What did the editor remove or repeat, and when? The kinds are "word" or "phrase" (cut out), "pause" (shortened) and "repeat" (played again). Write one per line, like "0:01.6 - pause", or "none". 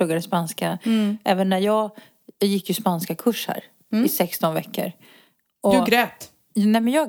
none